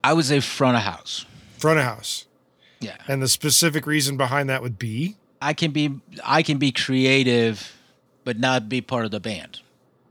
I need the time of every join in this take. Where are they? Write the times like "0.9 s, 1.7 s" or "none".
5.4 s